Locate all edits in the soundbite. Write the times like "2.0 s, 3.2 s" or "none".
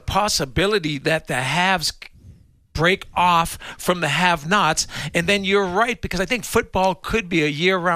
none